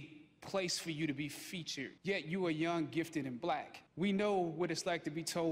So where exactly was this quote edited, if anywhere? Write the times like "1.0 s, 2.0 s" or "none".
2.0 s, 3.9 s